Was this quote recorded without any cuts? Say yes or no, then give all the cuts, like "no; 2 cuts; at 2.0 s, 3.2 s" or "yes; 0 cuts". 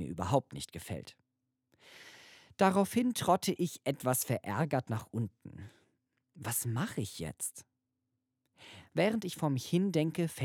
yes; 0 cuts